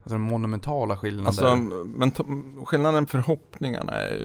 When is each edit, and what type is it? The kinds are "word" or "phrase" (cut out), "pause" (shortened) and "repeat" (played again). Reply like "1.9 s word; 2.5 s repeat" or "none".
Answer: 3.1 s word